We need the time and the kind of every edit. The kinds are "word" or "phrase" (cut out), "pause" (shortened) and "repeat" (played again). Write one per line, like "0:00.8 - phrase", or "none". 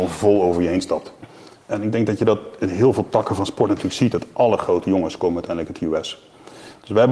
none

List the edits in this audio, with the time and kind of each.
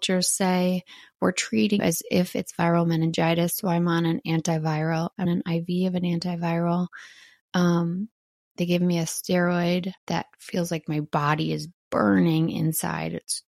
0:01.8 - word
0:05.3 - word
0:10.0 - pause

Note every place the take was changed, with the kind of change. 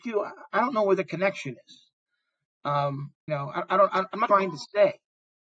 0:03.3 - word
0:04.3 - phrase

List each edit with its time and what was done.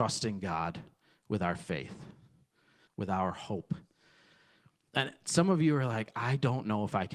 0:02.9 - phrase

